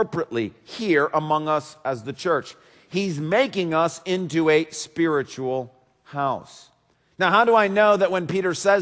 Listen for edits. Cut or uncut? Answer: uncut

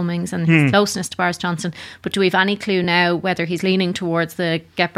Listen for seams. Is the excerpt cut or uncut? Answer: uncut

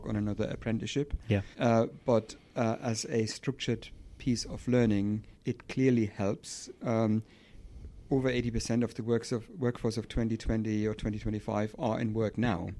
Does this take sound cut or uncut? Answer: cut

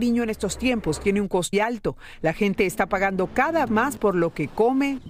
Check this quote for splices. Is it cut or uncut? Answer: cut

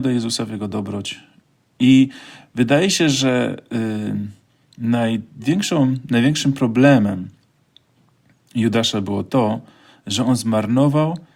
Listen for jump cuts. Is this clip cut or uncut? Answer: cut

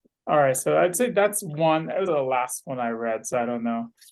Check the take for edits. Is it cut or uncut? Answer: cut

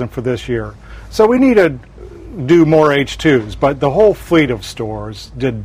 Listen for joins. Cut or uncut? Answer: uncut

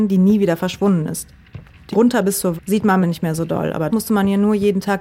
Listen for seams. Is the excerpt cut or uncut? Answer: cut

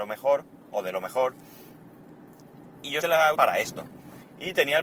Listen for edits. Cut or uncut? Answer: cut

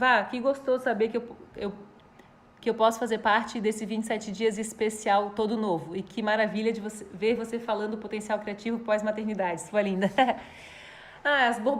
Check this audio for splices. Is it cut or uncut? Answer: uncut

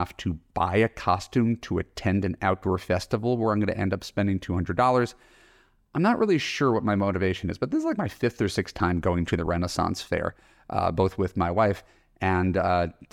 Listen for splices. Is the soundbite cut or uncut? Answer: uncut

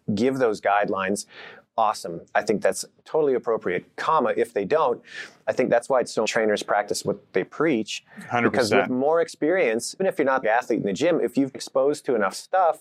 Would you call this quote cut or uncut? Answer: cut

